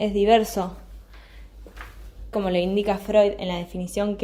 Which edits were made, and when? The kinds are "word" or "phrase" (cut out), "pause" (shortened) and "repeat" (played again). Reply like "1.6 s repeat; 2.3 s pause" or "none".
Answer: 2.3 s word